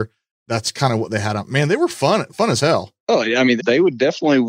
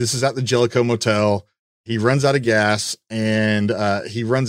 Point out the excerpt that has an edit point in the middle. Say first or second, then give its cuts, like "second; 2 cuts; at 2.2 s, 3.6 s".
first; 2 cuts; at 3.0 s, 3.6 s